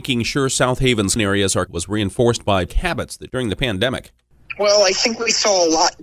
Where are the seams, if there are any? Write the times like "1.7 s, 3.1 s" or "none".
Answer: 1.2 s, 1.7 s, 2.7 s, 3.3 s